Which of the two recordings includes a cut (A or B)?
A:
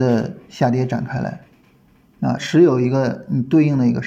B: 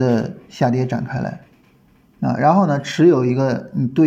A